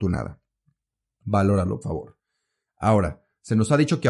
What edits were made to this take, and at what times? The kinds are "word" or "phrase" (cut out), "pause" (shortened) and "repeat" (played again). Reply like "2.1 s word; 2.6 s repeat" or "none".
1.8 s word